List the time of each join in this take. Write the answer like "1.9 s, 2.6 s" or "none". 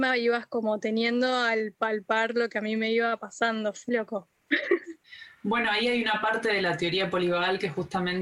3.9 s